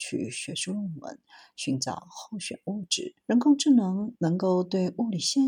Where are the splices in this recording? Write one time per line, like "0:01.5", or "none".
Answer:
0:03.2